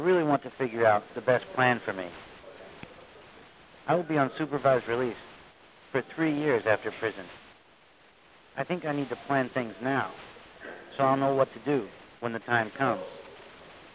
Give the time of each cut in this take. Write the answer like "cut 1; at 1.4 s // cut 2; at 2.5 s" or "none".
none